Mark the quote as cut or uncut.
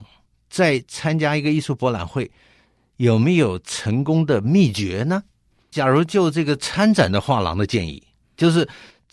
cut